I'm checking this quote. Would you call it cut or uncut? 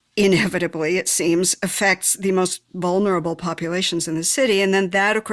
uncut